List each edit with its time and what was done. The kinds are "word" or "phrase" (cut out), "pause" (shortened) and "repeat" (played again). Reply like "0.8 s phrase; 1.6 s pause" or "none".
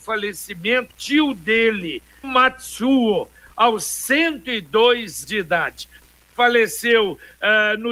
0.9 s word; 2.2 s word; 5.2 s word

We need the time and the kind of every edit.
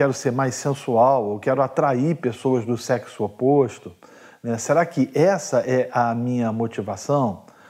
none

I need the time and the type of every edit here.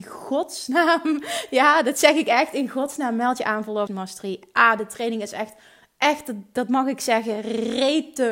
3.9 s word

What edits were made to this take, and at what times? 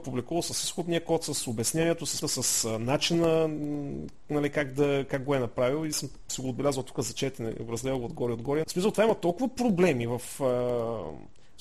2.2 s word; 5.9 s word; 8.6 s word

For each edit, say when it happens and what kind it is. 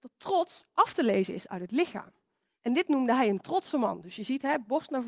none

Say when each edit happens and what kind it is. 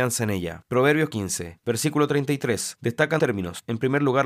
1.1 s word; 3.2 s word

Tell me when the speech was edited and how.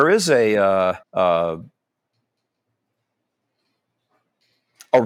1.0 s pause

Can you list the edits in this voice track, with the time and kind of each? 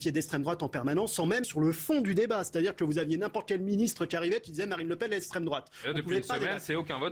1.4 s word

